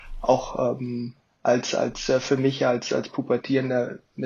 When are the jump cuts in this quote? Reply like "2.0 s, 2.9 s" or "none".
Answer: none